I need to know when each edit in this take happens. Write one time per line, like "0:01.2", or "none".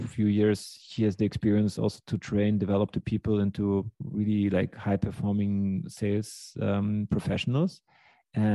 0:03.9